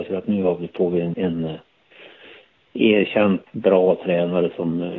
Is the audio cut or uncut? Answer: cut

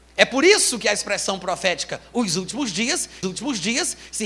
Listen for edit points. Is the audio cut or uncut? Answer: cut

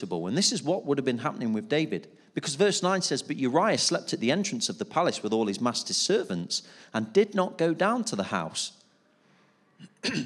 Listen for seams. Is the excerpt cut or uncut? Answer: uncut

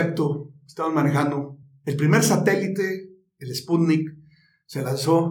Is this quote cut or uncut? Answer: uncut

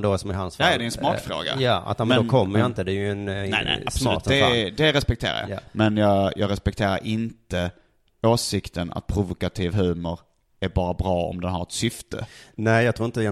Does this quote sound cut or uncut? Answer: uncut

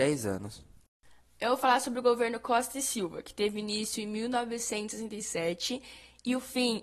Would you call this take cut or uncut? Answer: uncut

